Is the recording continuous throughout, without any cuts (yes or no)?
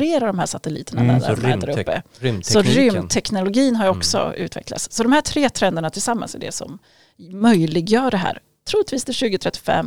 yes